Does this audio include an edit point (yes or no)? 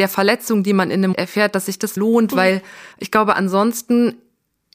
yes